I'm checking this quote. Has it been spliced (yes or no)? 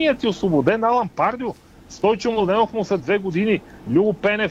yes